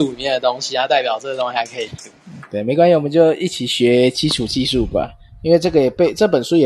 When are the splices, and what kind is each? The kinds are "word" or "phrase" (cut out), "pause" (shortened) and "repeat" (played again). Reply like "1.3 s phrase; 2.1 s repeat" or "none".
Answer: none